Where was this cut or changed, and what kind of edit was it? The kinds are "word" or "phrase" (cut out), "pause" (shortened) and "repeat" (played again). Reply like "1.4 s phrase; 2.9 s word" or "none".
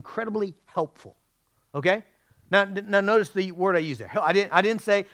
none

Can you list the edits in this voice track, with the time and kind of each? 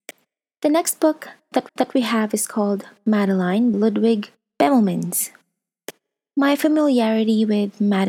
1.7 s repeat; 3.7 s word; 4.4 s pause

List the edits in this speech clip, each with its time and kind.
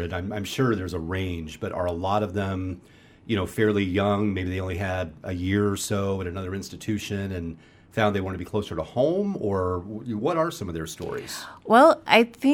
none

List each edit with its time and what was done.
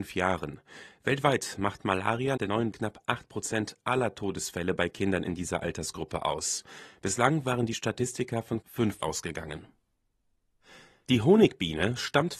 2.4 s word; 2.7 s word; 8.6 s word; 9.0 s word

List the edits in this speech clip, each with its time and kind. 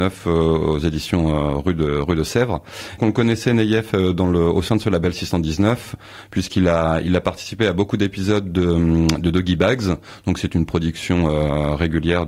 3.0 s word

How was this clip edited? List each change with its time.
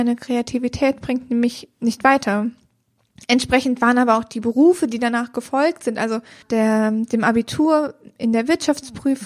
6.4 s word

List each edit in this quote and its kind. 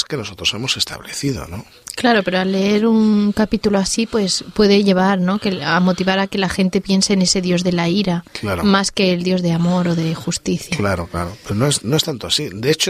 none

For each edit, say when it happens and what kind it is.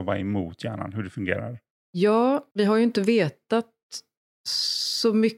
none

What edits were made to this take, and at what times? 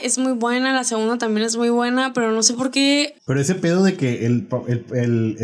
3.2 s pause

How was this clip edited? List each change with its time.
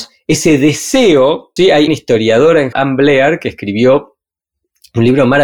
1.6 s word; 1.9 s word; 2.7 s word

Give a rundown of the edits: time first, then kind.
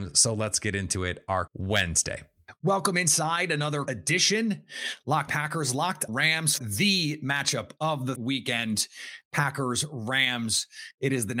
1.5 s word; 3.9 s word; 5.3 s word; 6.1 s word; 6.6 s word; 8.2 s word

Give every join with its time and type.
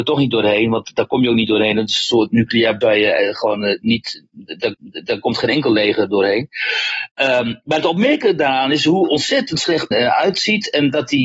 2.8 s word; 4.7 s repeat; 9.9 s word

